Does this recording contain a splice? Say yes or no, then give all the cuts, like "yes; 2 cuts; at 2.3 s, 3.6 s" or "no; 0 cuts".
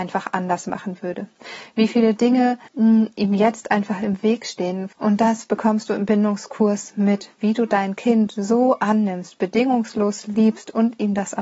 yes; 1 cut; at 2.7 s